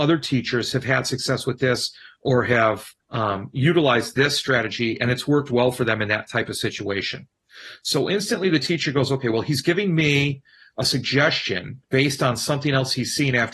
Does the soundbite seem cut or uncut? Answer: cut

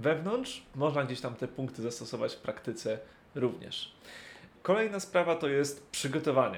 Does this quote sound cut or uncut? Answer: uncut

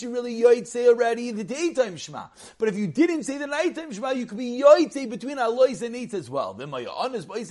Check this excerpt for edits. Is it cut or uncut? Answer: uncut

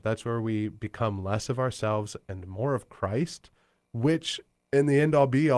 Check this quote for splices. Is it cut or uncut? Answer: uncut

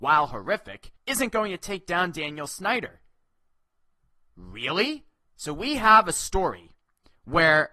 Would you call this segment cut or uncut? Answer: cut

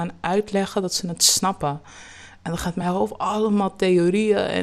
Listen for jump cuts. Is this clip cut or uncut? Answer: uncut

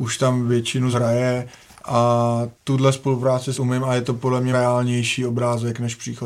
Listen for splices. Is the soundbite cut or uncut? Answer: cut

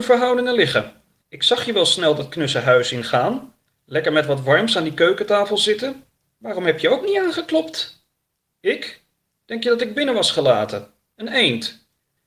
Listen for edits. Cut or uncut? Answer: uncut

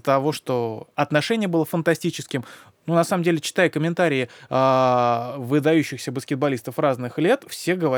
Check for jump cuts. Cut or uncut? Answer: uncut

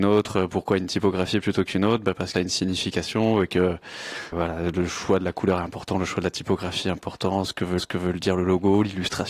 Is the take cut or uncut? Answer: cut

